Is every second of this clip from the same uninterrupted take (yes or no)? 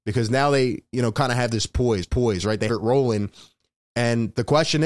no